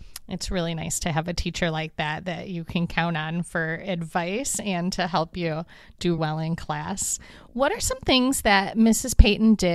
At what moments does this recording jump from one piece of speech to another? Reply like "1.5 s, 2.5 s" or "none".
6.2 s